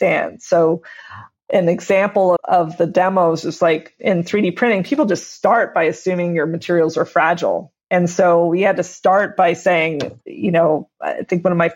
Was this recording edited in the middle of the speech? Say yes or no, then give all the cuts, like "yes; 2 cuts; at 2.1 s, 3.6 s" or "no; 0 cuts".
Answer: yes; 2 cuts; at 2.4 s, 7.8 s